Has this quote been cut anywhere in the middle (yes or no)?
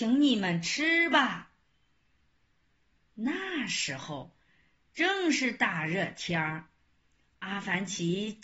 no